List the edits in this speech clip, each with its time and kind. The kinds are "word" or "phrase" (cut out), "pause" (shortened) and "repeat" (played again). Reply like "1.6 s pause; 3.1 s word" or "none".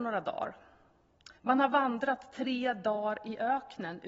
1.4 s pause

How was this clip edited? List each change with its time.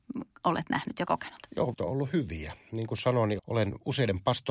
1.7 s word; 3.4 s word

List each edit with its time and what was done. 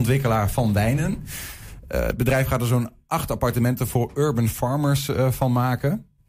none

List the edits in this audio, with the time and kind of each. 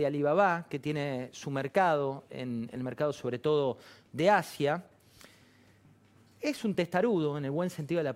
none

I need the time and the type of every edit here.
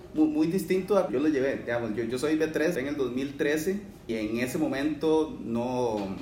1.1 s word; 2.7 s word; 4.1 s word

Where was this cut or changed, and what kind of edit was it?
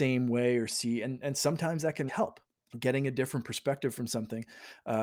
2.1 s word; 2.5 s pause

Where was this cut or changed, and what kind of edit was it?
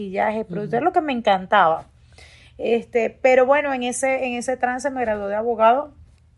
none

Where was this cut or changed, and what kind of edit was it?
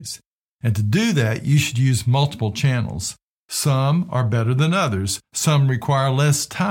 none

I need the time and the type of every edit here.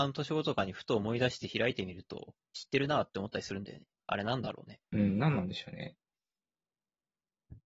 2.4 s pause; 3.9 s pause; 4.8 s pause

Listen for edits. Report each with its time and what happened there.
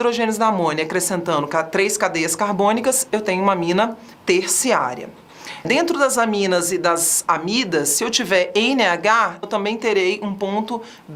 4.1 s pause; 9.4 s word

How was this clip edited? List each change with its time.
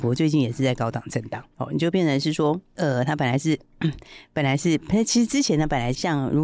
none

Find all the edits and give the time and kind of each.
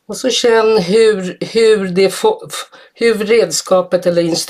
none

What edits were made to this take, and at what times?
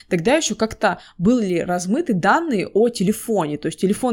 none

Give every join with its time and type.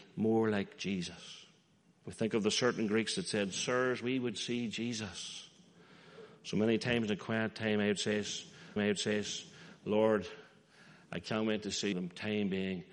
1.8 s pause; 8.8 s repeat; 11.9 s phrase

